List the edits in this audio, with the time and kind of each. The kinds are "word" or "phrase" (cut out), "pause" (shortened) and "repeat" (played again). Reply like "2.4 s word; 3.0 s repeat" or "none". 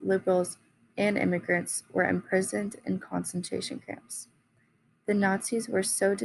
none